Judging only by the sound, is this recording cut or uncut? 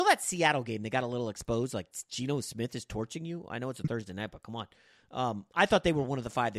uncut